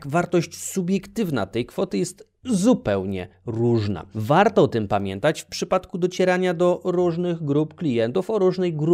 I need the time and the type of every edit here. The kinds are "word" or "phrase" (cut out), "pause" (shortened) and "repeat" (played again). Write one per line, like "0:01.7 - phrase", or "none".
none